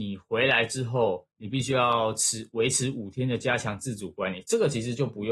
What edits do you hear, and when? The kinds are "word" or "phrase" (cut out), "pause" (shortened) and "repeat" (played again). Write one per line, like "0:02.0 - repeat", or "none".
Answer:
0:01.3 - pause